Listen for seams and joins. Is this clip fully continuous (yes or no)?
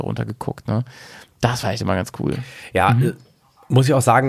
yes